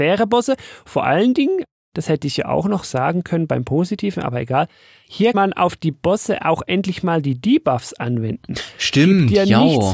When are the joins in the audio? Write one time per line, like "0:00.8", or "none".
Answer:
0:05.3